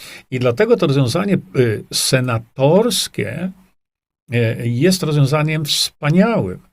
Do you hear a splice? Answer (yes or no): no